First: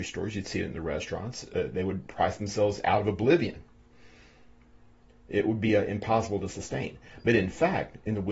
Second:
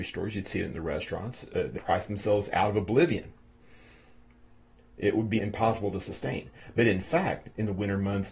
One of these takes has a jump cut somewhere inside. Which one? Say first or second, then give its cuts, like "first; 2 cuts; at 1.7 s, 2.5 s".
second; 2 cuts; at 1.8 s, 5.4 s